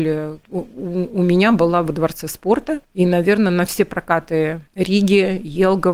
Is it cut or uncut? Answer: cut